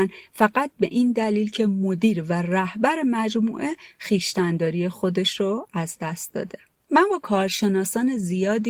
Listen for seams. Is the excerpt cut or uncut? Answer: uncut